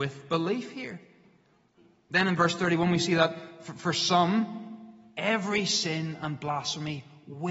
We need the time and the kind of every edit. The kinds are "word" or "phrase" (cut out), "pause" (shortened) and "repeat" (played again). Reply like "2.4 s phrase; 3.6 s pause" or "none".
none

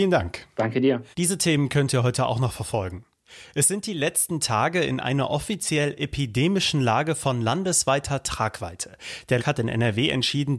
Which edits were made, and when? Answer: 1.1 s pause; 9.4 s word

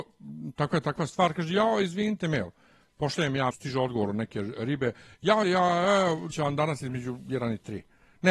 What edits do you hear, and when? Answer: 2.2 s phrase; 3.5 s word; 5.4 s word; 6.3 s word

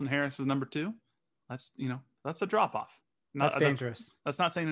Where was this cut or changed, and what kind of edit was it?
none

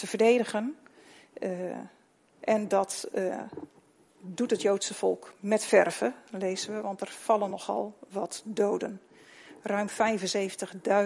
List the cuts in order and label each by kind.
none

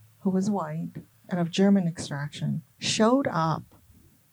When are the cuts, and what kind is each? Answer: 1.1 s pause; 2.7 s pause

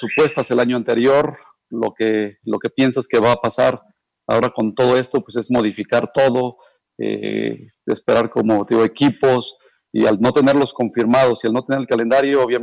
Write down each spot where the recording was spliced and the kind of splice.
none

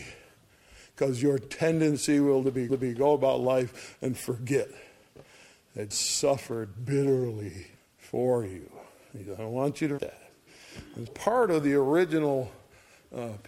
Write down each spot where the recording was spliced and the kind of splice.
2.7 s repeat; 5.9 s word; 7.8 s pause; 10.0 s word; 11.1 s word

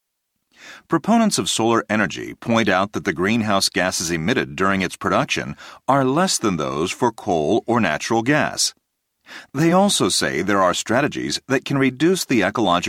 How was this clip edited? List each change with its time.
none

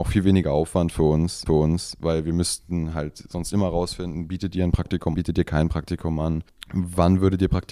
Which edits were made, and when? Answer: 1.5 s repeat; 5.1 s word

